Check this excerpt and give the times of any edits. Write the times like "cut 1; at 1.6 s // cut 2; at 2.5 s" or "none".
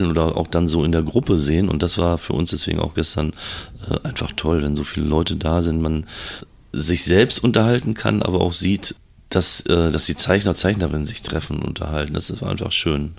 none